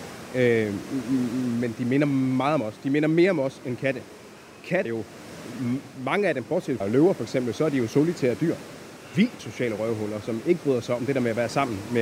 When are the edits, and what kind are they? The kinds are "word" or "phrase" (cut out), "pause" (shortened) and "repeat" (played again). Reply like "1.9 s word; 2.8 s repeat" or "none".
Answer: 4.9 s word; 6.8 s word; 9.4 s word